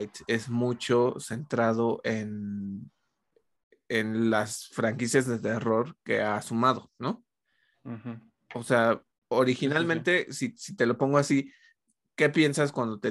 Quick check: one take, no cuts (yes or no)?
yes